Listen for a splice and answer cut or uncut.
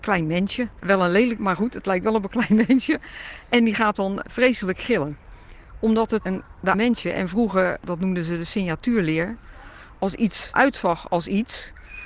cut